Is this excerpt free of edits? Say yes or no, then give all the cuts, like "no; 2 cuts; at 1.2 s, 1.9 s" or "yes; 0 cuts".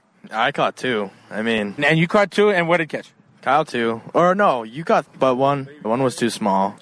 no; 5 cuts; at 1.8 s, 2.9 s, 3.6 s, 5.0 s, 5.8 s